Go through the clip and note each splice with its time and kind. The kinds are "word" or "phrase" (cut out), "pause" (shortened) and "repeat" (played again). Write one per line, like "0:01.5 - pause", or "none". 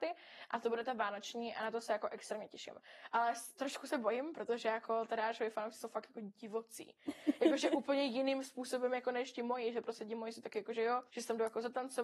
0:11.1 - pause